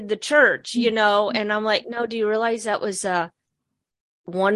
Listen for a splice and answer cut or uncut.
uncut